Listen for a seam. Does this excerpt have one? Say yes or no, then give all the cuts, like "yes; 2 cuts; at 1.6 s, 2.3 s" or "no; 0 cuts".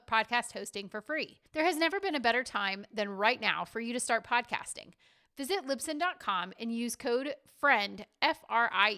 yes; 1 cut; at 1.5 s